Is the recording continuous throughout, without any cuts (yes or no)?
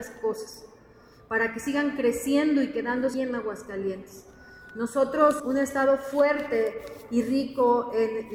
no